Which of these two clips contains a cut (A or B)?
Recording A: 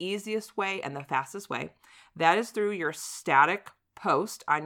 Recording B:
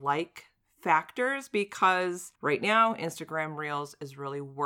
B